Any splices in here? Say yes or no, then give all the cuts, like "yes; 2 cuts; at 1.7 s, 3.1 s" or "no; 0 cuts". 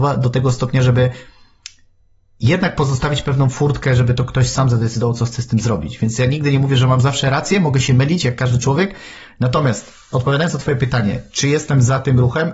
no; 0 cuts